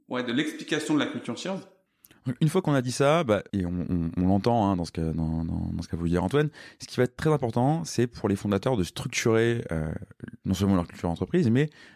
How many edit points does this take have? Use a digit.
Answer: 1